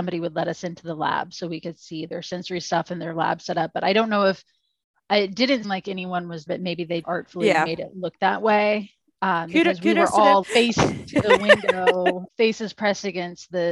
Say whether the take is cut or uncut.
cut